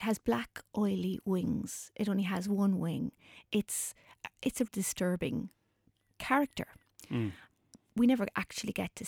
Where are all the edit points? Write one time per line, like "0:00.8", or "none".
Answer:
0:04.7
0:05.9